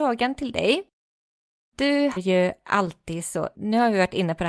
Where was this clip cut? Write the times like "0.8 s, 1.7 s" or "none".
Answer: 2.2 s, 3.5 s

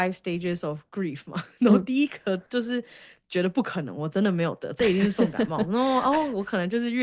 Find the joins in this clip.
2.5 s

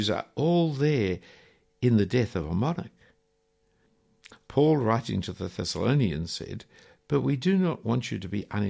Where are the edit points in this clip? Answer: none

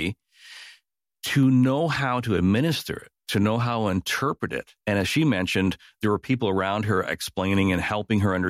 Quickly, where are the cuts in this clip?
4.8 s

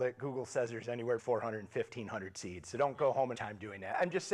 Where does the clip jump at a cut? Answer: 1.2 s, 3.3 s

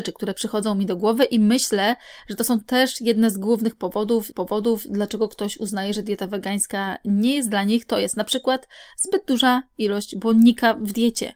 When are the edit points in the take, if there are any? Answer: 4.3 s

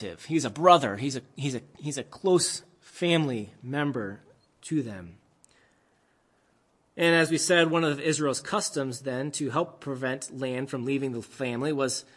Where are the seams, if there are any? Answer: none

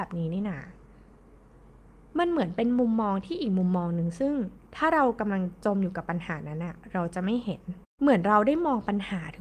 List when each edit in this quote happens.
4.7 s

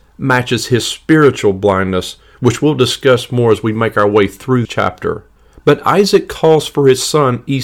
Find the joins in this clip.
4.6 s

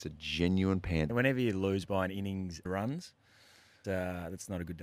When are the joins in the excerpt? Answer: 1.1 s, 2.7 s, 3.8 s

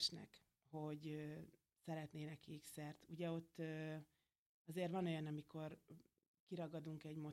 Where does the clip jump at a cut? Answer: none

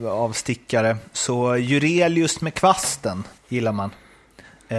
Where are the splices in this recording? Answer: 3.4 s

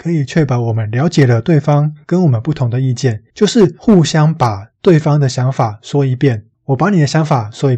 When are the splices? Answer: 3.3 s, 6.5 s

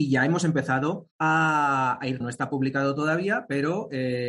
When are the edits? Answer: 1.1 s, 2.2 s

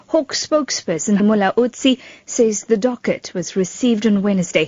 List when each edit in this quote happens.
1.2 s

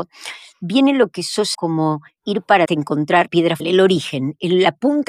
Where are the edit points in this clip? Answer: 1.5 s, 2.2 s, 2.7 s, 3.3 s, 3.6 s

